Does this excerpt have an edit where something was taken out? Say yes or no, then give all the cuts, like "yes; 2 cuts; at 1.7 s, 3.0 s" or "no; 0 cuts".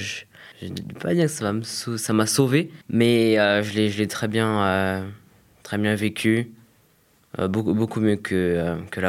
yes; 1 cut; at 2.8 s